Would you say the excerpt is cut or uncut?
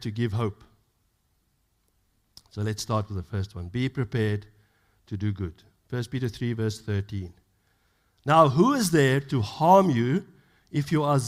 uncut